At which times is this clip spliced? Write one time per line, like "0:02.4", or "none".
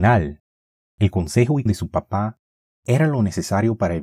0:01.7